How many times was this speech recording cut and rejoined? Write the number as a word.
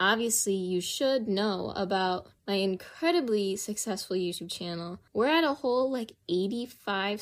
two